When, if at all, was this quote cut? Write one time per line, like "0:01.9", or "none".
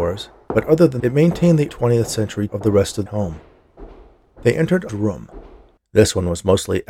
0:01.0
0:01.7
0:02.5
0:03.1
0:04.9